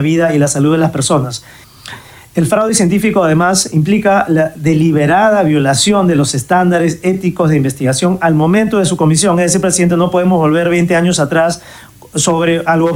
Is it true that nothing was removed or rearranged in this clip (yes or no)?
yes